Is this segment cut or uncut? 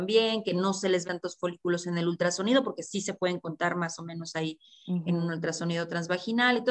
cut